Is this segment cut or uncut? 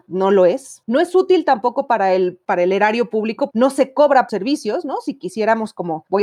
cut